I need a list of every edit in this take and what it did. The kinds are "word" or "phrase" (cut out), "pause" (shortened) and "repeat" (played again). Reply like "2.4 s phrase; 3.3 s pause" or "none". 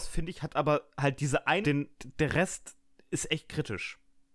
1.6 s phrase